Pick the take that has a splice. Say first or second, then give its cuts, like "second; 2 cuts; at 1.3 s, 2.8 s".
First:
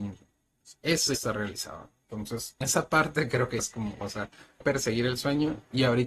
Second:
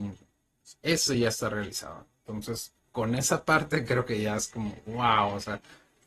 first; 5 cuts; at 1.1 s, 2.6 s, 3.6 s, 4.0 s, 4.6 s